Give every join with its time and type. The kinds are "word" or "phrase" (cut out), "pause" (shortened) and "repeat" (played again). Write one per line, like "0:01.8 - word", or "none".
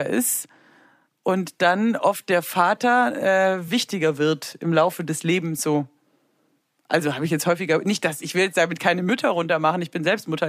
none

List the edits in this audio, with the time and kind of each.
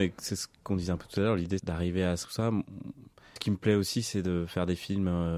0:01.6 - word
0:02.2 - word
0:03.4 - word

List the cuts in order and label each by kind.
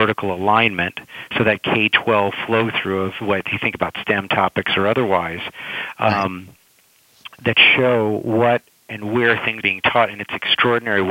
0:09.6 - word

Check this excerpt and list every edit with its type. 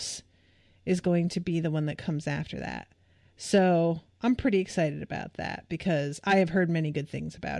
none

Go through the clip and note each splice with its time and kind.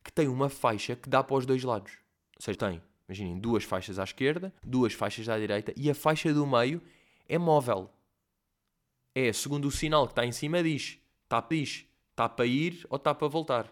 0:02.2 - pause
0:02.5 - word
0:04.6 - pause
0:11.5 - repeat

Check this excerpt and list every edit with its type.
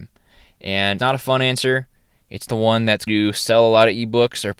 0:01.0 - word
0:02.5 - word
0:03.1 - word

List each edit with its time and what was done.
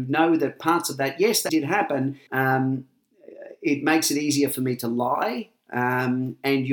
0:01.5 - word
0:02.3 - word

